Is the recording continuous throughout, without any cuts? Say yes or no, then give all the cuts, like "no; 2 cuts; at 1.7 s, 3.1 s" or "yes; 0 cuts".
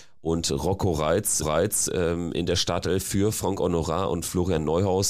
no; 1 cut; at 1.4 s